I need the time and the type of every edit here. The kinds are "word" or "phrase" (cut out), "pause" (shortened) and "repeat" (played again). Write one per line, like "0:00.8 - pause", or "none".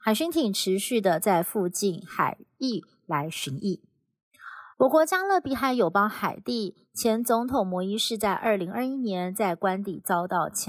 0:04.7 - pause